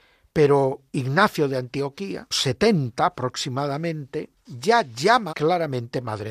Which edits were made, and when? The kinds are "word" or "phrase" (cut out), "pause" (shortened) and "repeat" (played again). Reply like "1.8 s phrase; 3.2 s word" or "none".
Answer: 2.3 s phrase; 4.4 s pause; 5.3 s phrase